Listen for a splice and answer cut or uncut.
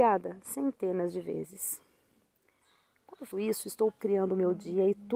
cut